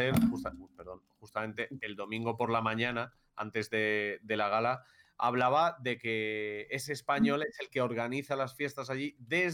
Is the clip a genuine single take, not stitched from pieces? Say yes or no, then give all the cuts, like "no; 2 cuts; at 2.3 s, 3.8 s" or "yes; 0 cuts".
yes; 0 cuts